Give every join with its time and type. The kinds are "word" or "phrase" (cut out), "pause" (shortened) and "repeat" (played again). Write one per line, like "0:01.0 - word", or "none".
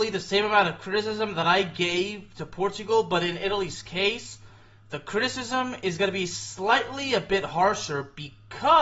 none